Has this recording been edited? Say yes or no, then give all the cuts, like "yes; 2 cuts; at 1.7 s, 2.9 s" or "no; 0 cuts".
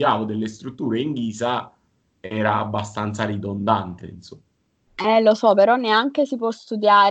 no; 0 cuts